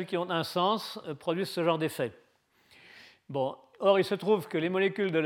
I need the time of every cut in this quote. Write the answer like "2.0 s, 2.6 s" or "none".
none